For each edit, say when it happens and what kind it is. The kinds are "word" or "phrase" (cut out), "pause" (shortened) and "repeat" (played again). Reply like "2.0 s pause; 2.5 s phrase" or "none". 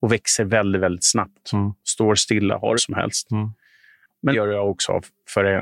2.8 s phrase; 4.3 s word